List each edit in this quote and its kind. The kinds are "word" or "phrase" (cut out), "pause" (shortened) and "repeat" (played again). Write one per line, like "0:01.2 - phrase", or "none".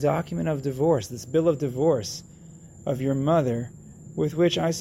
none